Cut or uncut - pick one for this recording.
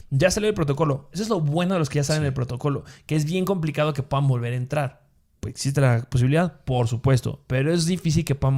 uncut